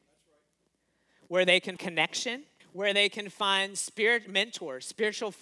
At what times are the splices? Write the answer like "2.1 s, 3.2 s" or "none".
1.8 s, 2.6 s